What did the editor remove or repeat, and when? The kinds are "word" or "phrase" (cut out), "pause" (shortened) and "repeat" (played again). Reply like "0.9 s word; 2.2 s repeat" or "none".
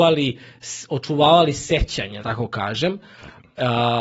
2.2 s word